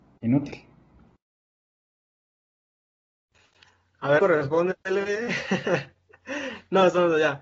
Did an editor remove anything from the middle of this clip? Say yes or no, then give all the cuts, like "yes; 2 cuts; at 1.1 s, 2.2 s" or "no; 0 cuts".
yes; 1 cut; at 4.2 s